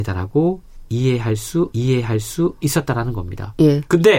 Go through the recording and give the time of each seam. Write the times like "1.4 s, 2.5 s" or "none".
1.7 s